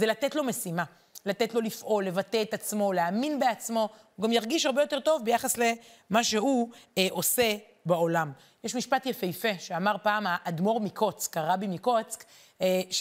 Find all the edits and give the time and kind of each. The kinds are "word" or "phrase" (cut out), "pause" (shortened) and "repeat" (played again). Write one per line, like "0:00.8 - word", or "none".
none